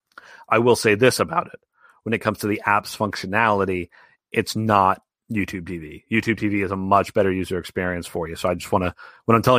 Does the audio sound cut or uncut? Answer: uncut